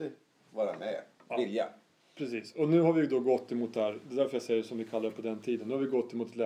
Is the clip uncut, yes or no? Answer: yes